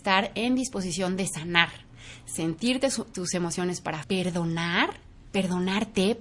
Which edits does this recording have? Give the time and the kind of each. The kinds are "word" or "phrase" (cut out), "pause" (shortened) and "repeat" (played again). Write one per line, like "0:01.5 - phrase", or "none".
0:04.0 - word